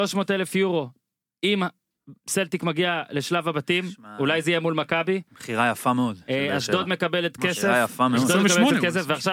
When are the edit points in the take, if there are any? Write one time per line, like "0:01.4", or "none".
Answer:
0:07.4